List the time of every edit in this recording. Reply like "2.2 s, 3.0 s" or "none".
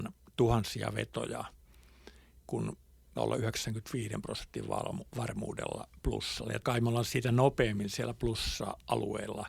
2.4 s, 3.2 s, 6.6 s

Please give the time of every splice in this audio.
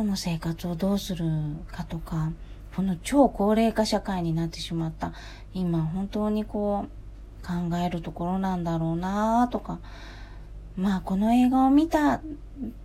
none

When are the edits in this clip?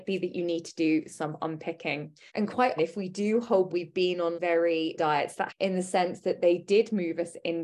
2.3 s, 2.8 s, 3.7 s, 4.3 s, 5.0 s, 5.5 s

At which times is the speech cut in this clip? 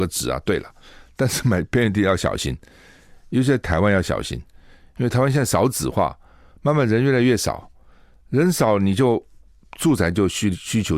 none

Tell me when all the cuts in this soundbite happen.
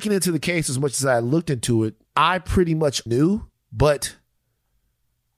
2.1 s, 3.1 s

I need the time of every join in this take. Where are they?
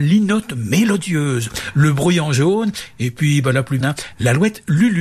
3.8 s

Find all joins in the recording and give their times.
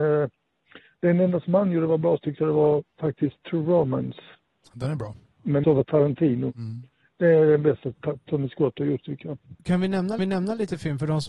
5.6 s, 10.2 s

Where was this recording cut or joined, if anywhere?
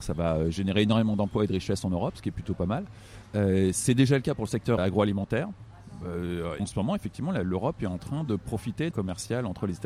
4.8 s, 6.6 s, 8.9 s

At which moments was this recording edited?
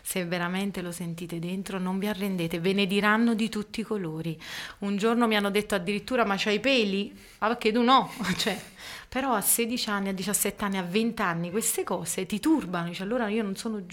none

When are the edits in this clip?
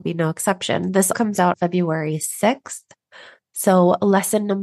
1.1 s, 1.5 s

